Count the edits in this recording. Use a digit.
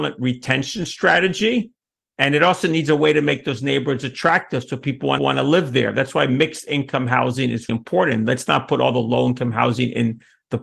2